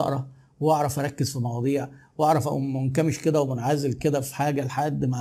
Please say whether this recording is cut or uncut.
uncut